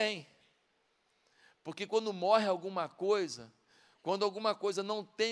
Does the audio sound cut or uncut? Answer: uncut